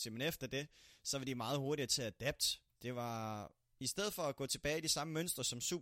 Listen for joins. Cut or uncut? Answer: uncut